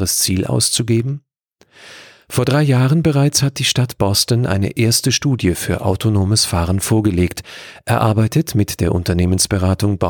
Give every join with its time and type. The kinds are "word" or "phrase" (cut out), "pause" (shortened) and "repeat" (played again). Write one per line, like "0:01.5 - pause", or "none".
none